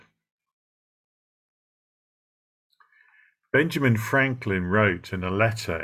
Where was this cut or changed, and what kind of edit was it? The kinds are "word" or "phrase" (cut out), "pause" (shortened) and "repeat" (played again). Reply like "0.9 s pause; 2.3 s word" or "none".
none